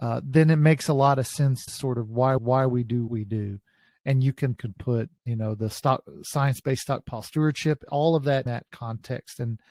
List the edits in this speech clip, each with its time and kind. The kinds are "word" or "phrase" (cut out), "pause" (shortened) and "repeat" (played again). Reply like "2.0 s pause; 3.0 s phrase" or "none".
1.7 s word; 2.4 s repeat; 3.1 s word; 4.6 s phrase; 5.2 s pause; 8.5 s word